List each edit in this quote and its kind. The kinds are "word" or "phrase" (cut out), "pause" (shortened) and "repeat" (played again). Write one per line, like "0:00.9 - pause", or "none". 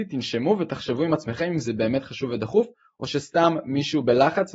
none